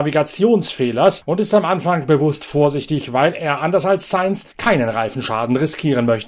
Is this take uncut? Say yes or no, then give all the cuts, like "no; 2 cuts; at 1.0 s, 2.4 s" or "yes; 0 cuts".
yes; 0 cuts